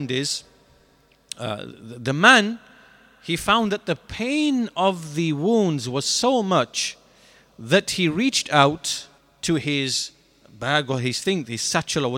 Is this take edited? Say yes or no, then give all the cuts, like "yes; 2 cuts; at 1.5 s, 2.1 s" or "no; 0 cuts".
yes; 2 cuts; at 1.9 s, 9.2 s